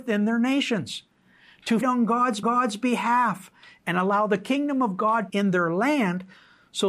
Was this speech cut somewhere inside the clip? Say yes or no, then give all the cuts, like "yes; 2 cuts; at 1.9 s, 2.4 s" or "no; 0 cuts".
yes; 3 cuts; at 1.8 s, 2.4 s, 5.3 s